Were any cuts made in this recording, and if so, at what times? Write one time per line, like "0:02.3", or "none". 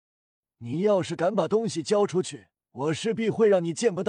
0:02.6